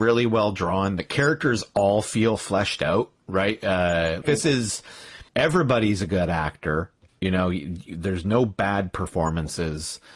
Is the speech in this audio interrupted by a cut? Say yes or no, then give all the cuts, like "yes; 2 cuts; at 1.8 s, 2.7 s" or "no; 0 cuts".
yes; 3 cuts; at 4.2 s, 5.3 s, 7.1 s